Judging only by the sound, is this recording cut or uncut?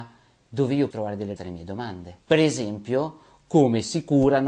cut